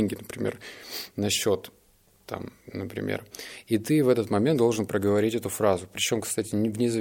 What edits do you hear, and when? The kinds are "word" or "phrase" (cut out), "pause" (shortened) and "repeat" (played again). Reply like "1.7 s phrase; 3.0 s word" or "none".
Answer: 2.6 s pause